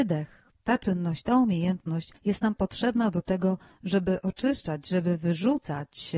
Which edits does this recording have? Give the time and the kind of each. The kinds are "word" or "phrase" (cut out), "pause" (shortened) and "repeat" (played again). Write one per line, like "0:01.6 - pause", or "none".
0:02.2 - pause